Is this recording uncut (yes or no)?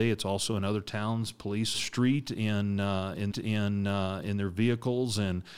no